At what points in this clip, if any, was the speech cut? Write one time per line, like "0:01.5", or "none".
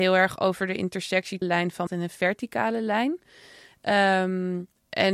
0:01.4
0:01.9